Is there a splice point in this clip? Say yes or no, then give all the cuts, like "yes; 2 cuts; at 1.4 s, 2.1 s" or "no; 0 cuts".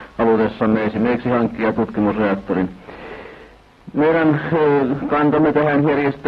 no; 0 cuts